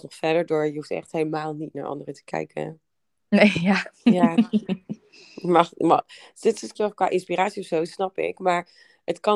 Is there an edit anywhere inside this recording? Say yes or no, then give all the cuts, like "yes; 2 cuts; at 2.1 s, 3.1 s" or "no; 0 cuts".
yes; 1 cut; at 6.7 s